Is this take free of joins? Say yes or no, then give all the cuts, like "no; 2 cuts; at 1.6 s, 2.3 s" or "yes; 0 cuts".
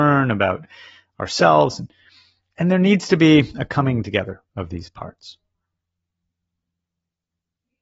yes; 0 cuts